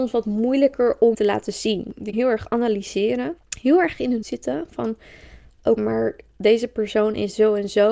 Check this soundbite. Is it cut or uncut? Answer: cut